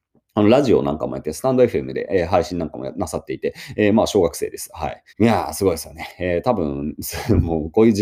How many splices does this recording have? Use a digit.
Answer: 1